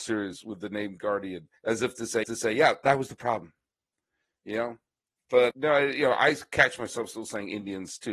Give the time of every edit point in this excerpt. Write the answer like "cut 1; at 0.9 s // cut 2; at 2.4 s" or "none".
cut 1; at 1.6 s // cut 2; at 2.2 s // cut 3; at 5.5 s